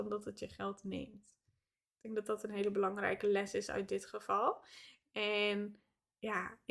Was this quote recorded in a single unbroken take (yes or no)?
yes